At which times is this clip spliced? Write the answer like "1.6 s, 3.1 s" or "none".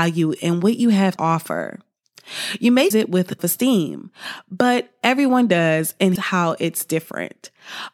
1.2 s, 2.9 s, 3.4 s, 6.2 s